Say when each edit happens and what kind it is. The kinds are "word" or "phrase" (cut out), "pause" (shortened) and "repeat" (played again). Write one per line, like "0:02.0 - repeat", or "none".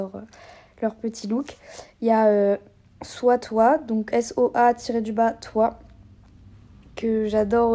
0:04.1 - word